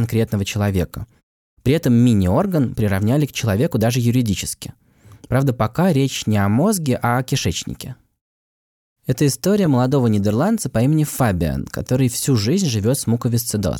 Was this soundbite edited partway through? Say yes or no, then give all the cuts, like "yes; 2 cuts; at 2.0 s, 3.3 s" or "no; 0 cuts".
no; 0 cuts